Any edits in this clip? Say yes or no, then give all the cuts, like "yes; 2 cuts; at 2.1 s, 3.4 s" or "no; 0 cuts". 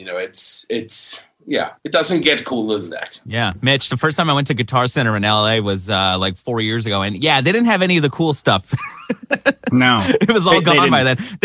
no; 0 cuts